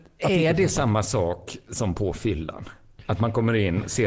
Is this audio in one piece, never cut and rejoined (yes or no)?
yes